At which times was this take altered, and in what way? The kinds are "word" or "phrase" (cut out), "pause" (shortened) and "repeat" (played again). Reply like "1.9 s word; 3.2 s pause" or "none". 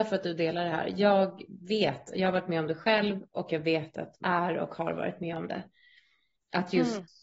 4.2 s word